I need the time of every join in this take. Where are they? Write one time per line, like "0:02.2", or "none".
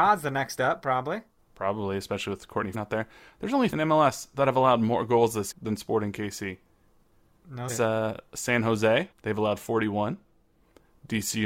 0:01.4
0:02.7
0:03.7
0:05.5
0:07.7
0:09.1